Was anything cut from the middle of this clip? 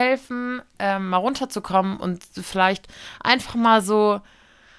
no; 0 cuts

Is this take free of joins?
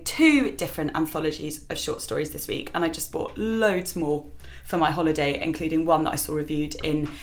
yes; 0 cuts

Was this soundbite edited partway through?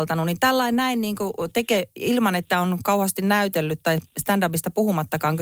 no; 0 cuts

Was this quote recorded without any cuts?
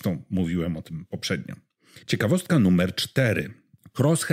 no; 1 cut; at 2.0 s

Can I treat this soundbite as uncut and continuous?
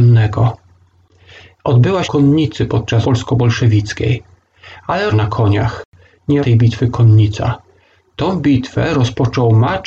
no; 4 cuts; at 2.0 s, 3.0 s, 5.1 s, 6.4 s

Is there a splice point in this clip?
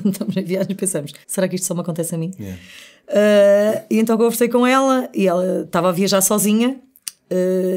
yes; 1 cut; at 1.2 s

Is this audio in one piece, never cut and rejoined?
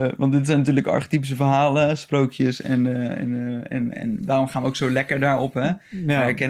no; 1 cut; at 3.9 s

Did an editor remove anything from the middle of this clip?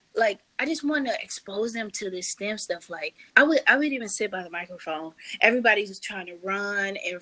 yes; 1 cut; at 3.3 s

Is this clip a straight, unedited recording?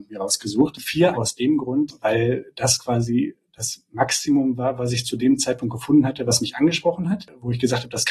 no; 1 cut; at 1.1 s

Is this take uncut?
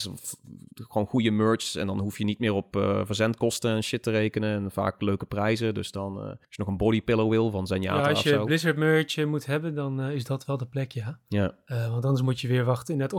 no; 1 cut; at 6.4 s

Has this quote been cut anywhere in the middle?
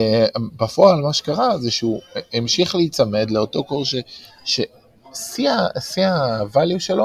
no; 0 cuts

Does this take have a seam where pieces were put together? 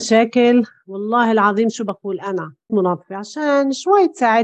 yes; 1 cut; at 2.7 s

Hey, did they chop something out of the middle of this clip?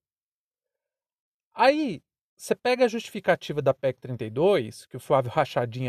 no; 0 cuts

